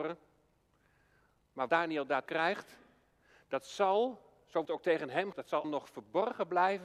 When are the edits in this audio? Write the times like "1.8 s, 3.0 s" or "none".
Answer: 1.7 s, 2.3 s, 4.7 s, 5.3 s, 5.6 s